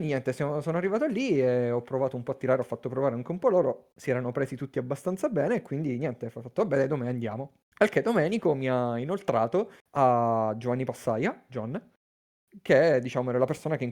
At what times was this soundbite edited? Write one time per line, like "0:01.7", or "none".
0:07.7
0:09.8